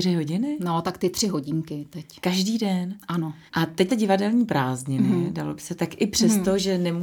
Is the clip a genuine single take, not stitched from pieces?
no; 2 cuts; at 3.5 s, 3.9 s

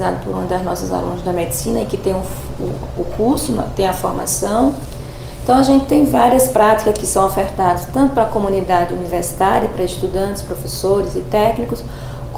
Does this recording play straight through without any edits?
yes; 0 cuts

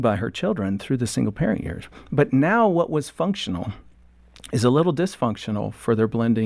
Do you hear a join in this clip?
no; 0 cuts

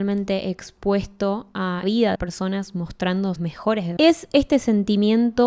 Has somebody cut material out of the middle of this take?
yes; 4 cuts; at 1.8 s, 2.1 s, 3.4 s, 4.0 s

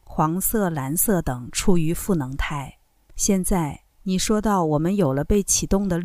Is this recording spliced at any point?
yes; 2 cuts; at 2.9 s, 3.9 s

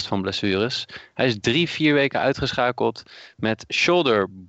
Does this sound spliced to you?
no; 0 cuts

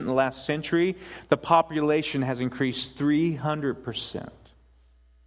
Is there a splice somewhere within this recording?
no; 0 cuts

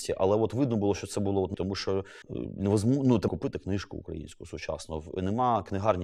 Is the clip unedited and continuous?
no; 3 cuts; at 1.5 s, 2.2 s, 3.3 s

